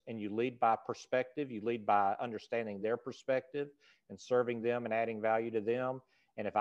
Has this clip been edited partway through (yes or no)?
no